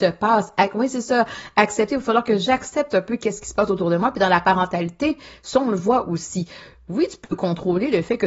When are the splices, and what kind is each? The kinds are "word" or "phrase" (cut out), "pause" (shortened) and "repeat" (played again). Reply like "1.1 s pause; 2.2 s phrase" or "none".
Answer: none